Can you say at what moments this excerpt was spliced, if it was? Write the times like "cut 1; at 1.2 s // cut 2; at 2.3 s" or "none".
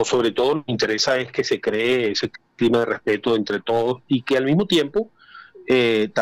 none